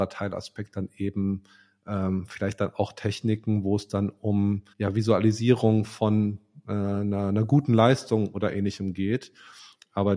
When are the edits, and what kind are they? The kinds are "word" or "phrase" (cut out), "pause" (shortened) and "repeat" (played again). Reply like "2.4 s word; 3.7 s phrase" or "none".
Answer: 4.7 s pause